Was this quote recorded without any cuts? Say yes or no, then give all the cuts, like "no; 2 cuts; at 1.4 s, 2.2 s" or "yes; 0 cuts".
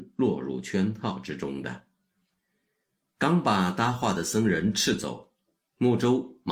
yes; 0 cuts